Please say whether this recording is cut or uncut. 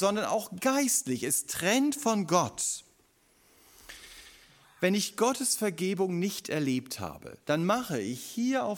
uncut